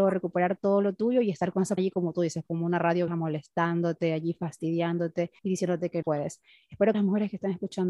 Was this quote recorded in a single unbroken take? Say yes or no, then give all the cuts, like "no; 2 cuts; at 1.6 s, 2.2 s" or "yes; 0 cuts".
no; 5 cuts; at 1.8 s, 3.1 s, 5.4 s, 6.0 s, 6.9 s